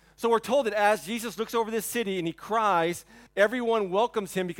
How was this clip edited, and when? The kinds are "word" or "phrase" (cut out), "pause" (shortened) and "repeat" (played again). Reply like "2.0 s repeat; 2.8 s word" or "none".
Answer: 3.3 s pause